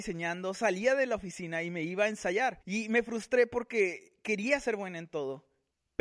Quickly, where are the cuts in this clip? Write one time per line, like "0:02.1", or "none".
0:02.6